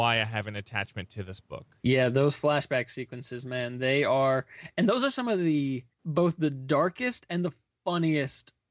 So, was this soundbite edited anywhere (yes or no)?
yes